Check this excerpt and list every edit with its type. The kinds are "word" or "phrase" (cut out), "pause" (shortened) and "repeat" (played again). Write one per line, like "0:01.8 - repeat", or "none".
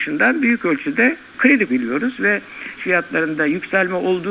0:01.7 - word
0:02.8 - word